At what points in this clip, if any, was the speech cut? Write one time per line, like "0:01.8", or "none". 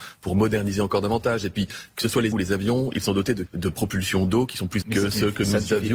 0:02.3
0:03.5
0:04.8